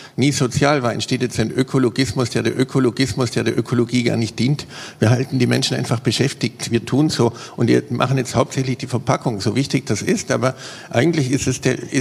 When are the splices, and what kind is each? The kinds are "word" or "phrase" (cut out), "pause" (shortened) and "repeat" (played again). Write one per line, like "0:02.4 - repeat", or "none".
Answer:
0:02.5 - repeat

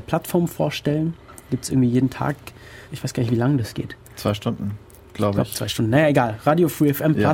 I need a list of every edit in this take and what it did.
0:02.9 - pause

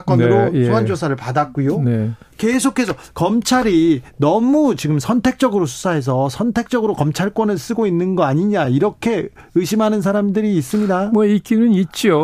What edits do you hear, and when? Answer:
none

